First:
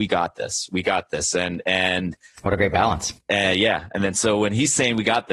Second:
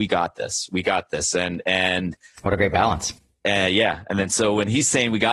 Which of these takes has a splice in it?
first; 1 cut; at 3.2 s

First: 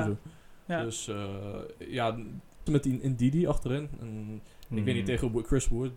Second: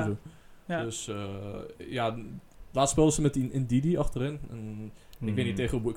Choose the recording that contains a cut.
first; 1 cut; at 2.7 s

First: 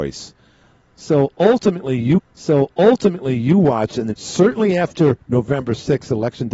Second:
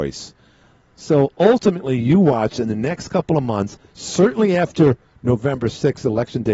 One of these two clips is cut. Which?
first; 3 cuts; at 2.2 s, 4.1 s, 5.2 s

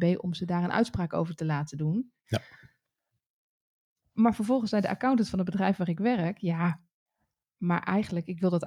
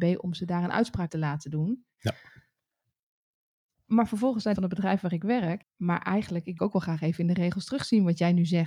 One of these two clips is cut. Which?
second; 4 cuts; at 1.1 s, 4.6 s, 5.6 s, 6.6 s

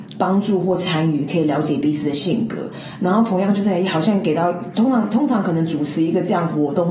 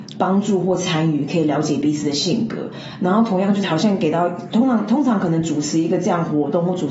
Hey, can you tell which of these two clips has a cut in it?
second; 1 cut; at 3.6 s

